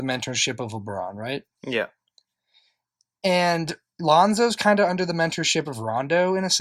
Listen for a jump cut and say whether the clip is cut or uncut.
uncut